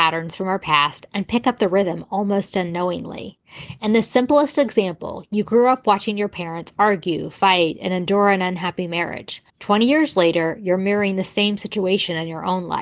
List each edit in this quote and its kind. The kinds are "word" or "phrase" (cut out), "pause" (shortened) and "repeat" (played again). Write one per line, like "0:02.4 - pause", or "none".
0:09.5 - pause

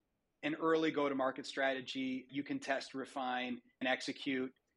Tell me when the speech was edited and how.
0:02.3 - word
0:03.8 - word

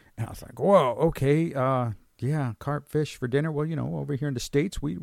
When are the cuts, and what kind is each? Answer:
none

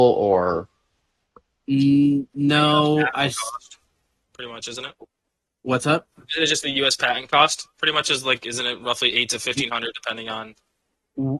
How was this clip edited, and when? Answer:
none

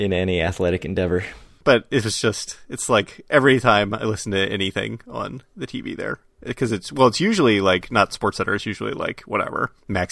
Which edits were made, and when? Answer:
none

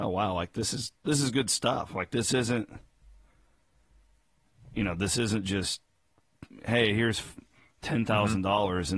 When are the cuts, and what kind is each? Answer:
none

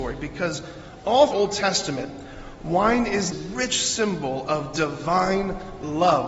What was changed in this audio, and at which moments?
0:01.3 - phrase
0:03.3 - word

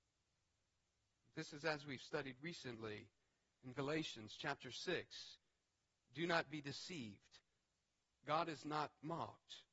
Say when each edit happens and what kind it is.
none

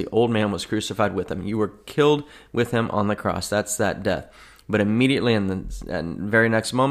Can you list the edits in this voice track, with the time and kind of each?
none

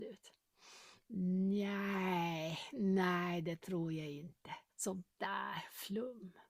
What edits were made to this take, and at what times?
0:04.7 - pause

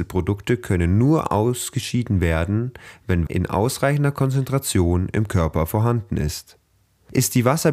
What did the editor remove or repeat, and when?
0:03.3 - word

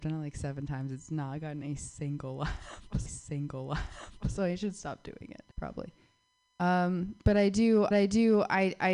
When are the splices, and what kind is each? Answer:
0:03.1 - repeat
0:05.5 - pause
0:07.9 - repeat

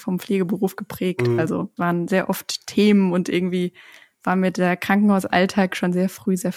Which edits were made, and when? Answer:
0:01.8 - word

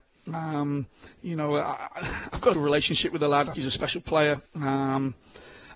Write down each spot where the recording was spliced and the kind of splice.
0:01.1 - pause
0:02.5 - word
0:03.5 - word
0:04.5 - pause

